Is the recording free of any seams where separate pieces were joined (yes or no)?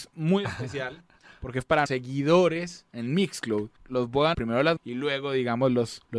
no